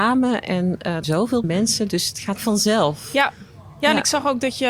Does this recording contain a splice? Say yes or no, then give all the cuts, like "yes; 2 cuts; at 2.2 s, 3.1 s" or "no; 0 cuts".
yes; 3 cuts; at 1.0 s, 1.4 s, 2.4 s